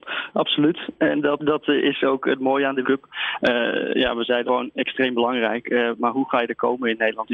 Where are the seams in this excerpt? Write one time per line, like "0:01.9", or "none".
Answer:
0:01.4
0:02.8
0:04.5